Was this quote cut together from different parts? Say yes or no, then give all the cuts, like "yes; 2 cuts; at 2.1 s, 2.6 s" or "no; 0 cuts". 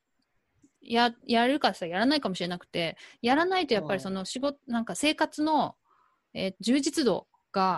yes; 2 cuts; at 1.2 s, 6.5 s